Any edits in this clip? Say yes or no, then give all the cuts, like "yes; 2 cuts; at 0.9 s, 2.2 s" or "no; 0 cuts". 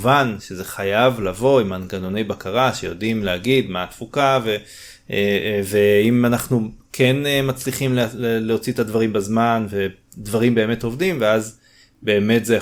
no; 0 cuts